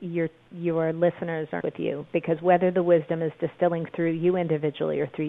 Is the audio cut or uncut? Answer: cut